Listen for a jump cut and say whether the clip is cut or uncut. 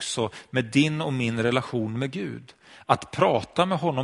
uncut